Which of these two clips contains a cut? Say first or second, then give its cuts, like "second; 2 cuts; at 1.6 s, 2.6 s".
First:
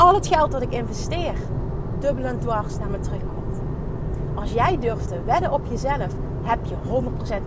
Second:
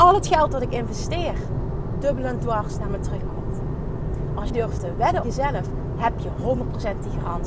second; 2 cuts; at 4.5 s, 5.2 s